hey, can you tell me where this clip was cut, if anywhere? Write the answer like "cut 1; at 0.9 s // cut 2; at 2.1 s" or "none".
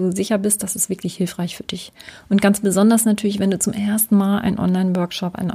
none